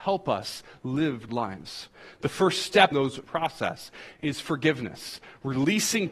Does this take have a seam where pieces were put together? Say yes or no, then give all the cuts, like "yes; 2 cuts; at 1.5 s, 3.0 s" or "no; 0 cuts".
yes; 3 cuts; at 1.3 s, 2.9 s, 3.2 s